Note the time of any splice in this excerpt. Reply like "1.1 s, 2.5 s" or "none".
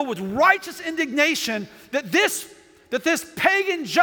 none